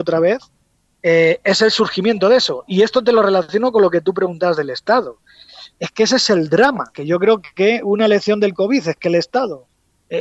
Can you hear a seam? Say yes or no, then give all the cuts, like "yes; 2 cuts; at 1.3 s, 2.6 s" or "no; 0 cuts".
no; 0 cuts